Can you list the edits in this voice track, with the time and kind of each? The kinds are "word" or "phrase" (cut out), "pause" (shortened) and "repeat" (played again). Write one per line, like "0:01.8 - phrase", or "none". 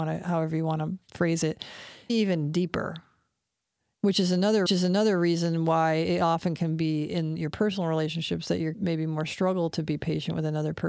0:02.1 - word
0:04.7 - repeat
0:08.7 - phrase